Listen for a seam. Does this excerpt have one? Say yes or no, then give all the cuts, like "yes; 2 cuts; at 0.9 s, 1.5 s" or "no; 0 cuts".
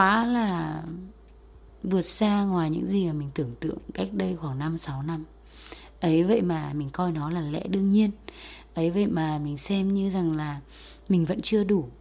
no; 0 cuts